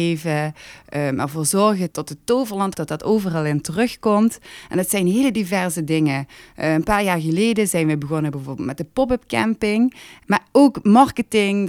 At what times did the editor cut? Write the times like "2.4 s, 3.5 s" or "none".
2.7 s